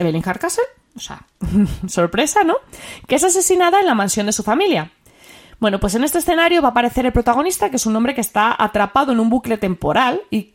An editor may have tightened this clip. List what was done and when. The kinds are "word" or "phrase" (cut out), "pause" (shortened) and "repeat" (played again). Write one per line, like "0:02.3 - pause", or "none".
0:01.3 - pause

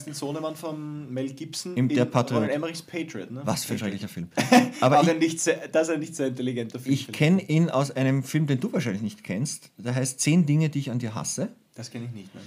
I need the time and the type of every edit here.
none

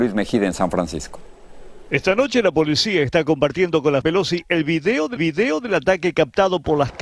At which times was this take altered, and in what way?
0:04.0 - word
0:05.2 - repeat

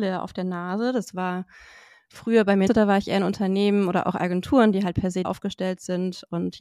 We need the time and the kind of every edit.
0:02.7 - word
0:05.2 - word

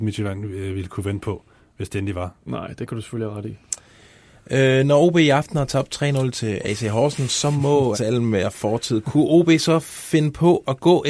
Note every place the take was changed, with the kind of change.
0:07.9 - word

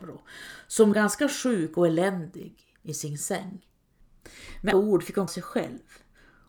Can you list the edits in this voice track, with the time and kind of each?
0:00.9 - word
0:02.7 - pause
0:04.7 - word
0:05.3 - word

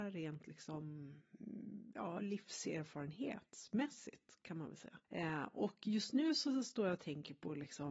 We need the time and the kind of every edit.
0:05.0 - pause

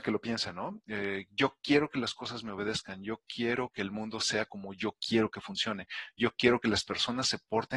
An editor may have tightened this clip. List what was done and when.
none

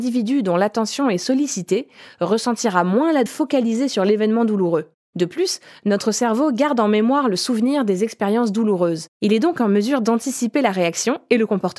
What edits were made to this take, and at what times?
0:03.3 - phrase

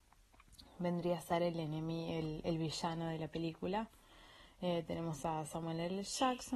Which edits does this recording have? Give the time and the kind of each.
none

